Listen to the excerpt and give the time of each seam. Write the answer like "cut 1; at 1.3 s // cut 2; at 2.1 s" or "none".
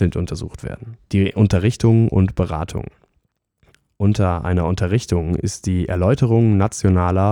cut 1; at 1.0 s

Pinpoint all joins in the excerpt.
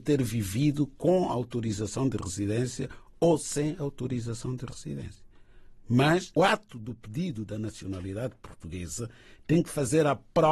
cut 1; at 6.4 s

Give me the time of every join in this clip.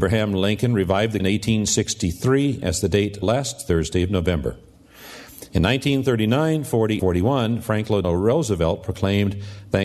cut 1; at 1.2 s // cut 2; at 2.6 s // cut 3; at 3.2 s // cut 4; at 7.0 s // cut 5; at 8.0 s

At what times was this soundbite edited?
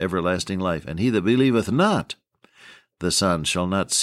none

